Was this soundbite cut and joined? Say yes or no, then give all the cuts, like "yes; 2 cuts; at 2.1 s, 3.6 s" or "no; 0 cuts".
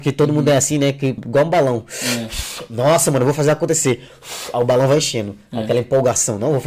yes; 1 cut; at 1.2 s